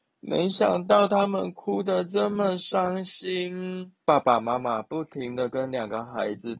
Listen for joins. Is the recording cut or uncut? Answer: cut